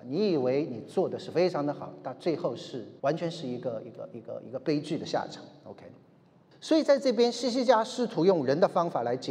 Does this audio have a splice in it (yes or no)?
yes